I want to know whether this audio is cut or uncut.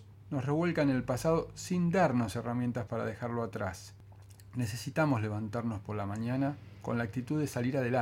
uncut